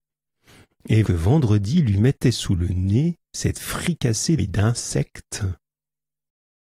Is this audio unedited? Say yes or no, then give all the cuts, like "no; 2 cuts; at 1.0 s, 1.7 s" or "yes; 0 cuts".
no; 3 cuts; at 1.0 s, 3.2 s, 4.4 s